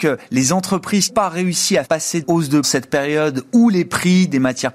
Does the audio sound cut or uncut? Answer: cut